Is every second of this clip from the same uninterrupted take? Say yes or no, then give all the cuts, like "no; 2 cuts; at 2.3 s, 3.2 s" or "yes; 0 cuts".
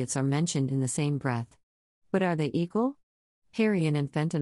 yes; 0 cuts